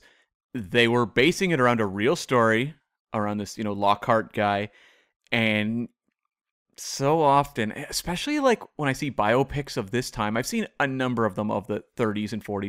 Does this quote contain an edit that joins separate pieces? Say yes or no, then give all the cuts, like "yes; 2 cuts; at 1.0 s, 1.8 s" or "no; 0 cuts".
no; 0 cuts